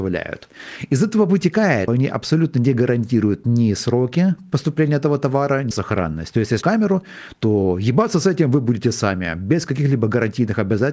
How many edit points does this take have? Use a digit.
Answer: 3